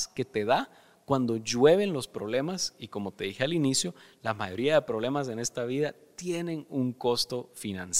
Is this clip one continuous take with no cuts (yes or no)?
yes